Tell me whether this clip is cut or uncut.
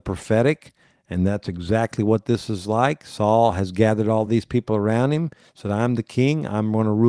uncut